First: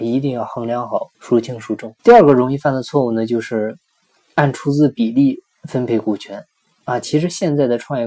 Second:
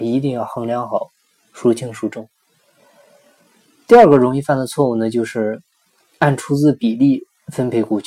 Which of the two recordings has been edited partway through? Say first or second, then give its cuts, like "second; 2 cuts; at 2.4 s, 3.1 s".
first; 2 cuts; at 1.1 s, 2.0 s